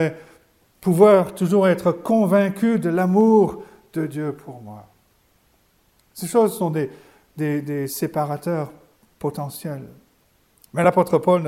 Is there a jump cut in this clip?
no; 0 cuts

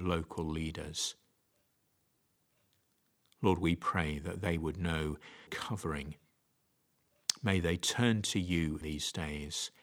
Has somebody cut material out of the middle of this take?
yes; 2 cuts; at 5.5 s, 8.8 s

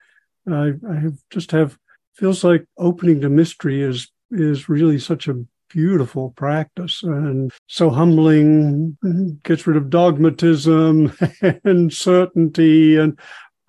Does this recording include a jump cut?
yes; 3 cuts; at 2.0 s, 2.7 s, 7.6 s

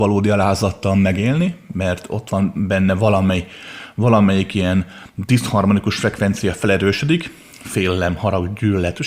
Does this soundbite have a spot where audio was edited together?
no; 0 cuts

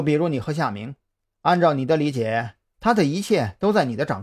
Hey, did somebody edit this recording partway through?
no; 0 cuts

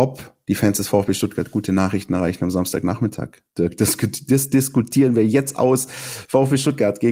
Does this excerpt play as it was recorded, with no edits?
yes; 0 cuts

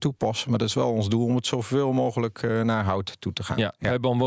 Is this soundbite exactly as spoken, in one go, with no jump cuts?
yes; 0 cuts

